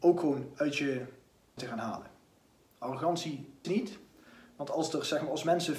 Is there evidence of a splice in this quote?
yes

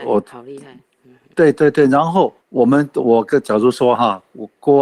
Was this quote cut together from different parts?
yes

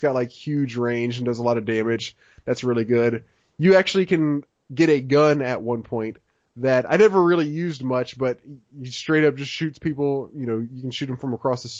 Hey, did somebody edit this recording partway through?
no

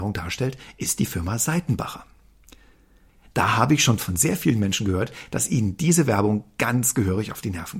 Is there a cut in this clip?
no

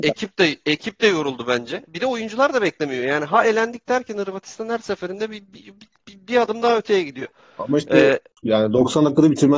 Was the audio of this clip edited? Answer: no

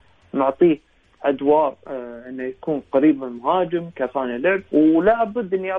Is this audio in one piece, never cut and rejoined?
no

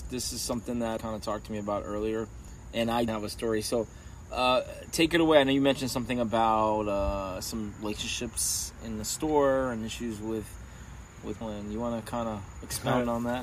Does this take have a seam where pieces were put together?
yes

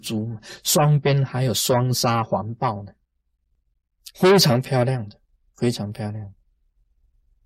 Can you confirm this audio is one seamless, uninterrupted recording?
yes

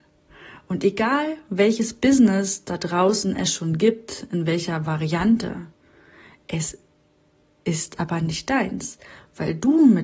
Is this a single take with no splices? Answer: yes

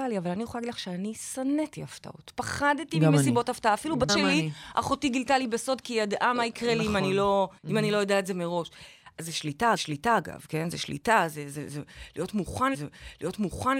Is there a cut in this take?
yes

